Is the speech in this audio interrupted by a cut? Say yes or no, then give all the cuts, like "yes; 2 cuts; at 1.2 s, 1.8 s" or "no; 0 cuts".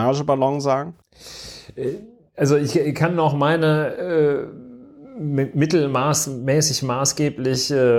no; 0 cuts